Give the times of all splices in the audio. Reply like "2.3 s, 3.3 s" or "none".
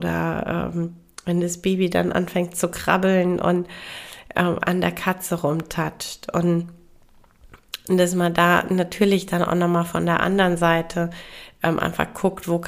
none